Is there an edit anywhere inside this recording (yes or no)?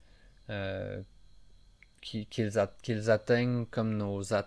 no